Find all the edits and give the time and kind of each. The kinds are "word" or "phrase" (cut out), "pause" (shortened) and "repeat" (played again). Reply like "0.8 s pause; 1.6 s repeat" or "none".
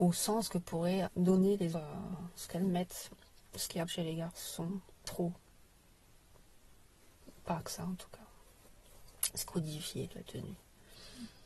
1.0 s word; 1.7 s word; 2.4 s word; 3.9 s word; 5.0 s word; 7.6 s word; 9.4 s word